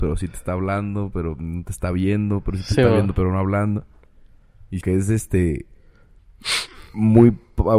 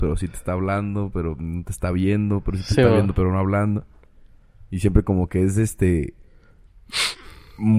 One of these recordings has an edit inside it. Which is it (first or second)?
first